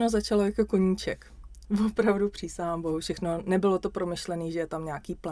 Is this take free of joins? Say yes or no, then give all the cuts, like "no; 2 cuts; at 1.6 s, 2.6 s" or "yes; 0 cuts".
yes; 0 cuts